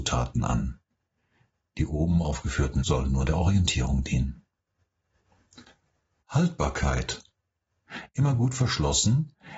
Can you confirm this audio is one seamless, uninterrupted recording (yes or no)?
no